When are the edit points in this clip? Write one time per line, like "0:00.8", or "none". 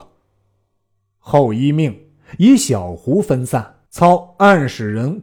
0:03.9